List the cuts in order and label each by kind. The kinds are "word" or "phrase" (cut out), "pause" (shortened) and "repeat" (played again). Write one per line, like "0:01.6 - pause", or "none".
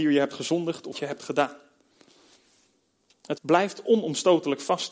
0:00.9 - word
0:03.3 - word